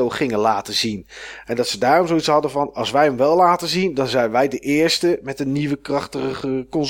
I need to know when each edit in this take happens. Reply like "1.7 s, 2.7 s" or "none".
none